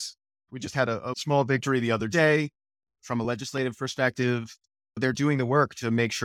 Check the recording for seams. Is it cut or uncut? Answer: uncut